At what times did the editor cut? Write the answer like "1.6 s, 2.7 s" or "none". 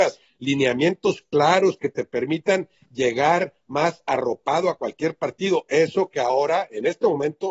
none